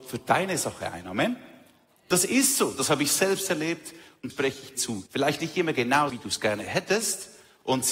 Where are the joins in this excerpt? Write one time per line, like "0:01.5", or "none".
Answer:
0:04.3
0:04.7
0:05.1
0:06.1